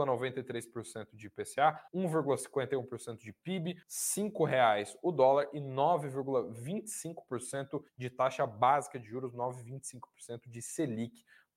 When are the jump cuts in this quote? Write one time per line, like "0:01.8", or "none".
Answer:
0:01.9
0:03.8
0:07.9